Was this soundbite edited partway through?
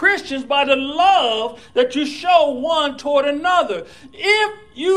no; 0 cuts

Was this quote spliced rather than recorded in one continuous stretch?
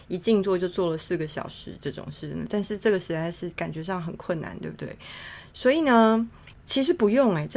no; 0 cuts

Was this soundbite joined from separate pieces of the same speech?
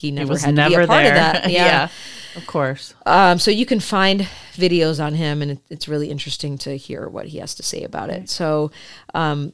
no; 0 cuts

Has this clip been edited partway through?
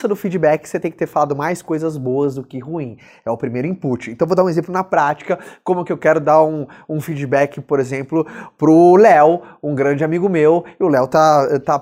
no; 0 cuts

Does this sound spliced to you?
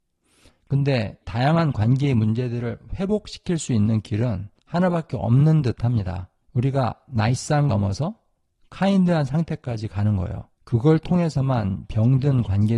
yes; 5 cuts; at 1.2 s, 4.6 s, 6.4 s, 7.7 s, 10.5 s

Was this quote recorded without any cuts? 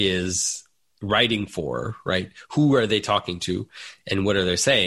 yes; 0 cuts

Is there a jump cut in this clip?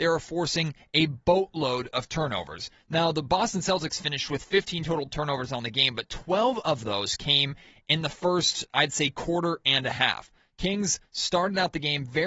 no; 0 cuts

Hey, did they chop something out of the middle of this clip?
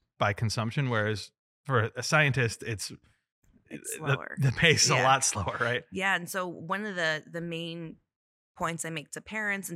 no; 0 cuts

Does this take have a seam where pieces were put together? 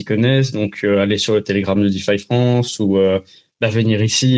no; 0 cuts

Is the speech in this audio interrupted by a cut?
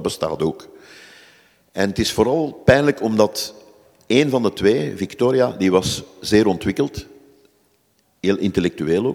no; 0 cuts

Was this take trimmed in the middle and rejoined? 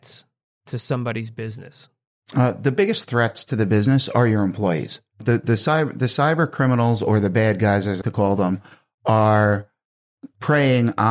yes; 1 cut; at 8.0 s

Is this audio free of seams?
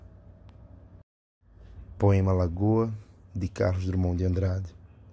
yes; 0 cuts

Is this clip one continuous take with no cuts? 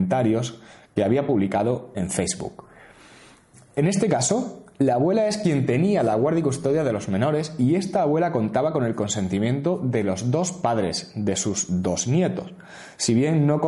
yes; 0 cuts

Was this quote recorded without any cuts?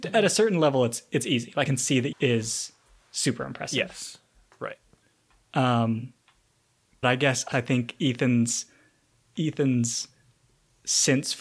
no; 4 cuts; at 1.7 s, 2.1 s, 7.0 s, 7.5 s

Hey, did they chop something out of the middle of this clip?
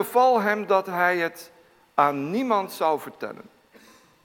no; 0 cuts

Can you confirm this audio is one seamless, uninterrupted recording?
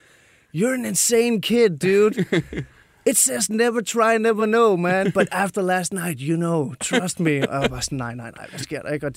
yes; 0 cuts

